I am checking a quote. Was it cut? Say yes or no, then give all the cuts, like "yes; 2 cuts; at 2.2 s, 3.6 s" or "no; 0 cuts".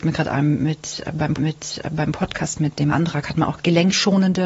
yes; 3 cuts; at 1.4 s, 2.9 s, 3.6 s